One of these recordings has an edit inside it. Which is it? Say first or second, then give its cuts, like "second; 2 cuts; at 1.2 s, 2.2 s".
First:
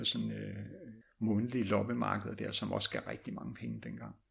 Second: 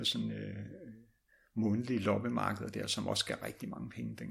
first; 1 cut; at 1.0 s